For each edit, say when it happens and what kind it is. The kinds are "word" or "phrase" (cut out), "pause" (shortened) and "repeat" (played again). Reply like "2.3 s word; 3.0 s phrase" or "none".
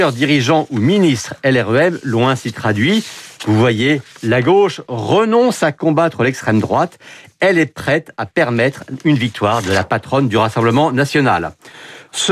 none

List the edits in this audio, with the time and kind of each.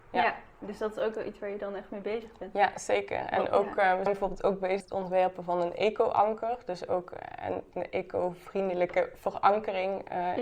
4.1 s word; 4.8 s word

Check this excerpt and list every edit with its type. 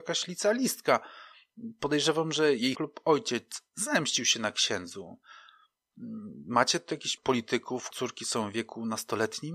2.7 s word; 7.2 s word; 7.9 s word

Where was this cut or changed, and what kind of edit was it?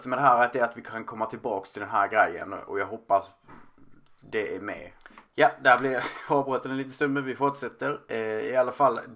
none

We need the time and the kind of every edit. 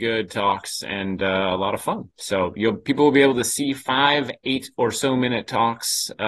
none

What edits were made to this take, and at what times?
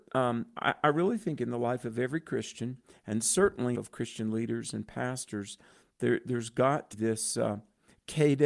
3.7 s phrase; 6.9 s word

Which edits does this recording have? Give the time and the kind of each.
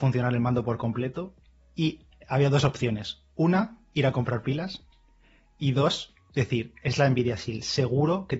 none

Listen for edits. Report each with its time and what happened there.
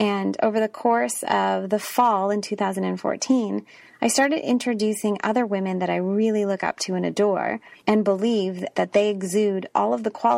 none

